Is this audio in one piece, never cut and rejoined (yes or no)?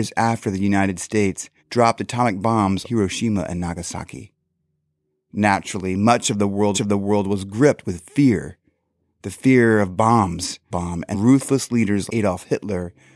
no